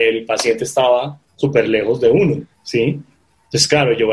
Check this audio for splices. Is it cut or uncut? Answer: cut